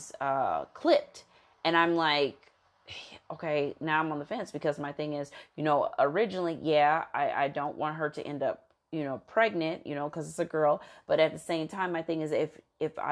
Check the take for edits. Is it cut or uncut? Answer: uncut